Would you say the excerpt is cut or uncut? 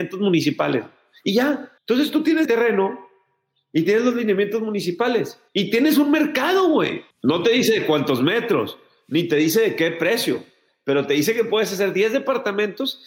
cut